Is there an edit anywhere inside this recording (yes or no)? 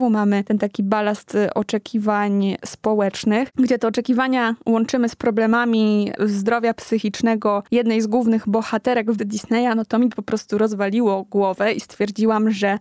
yes